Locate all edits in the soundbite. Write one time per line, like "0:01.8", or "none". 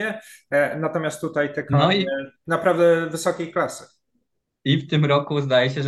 none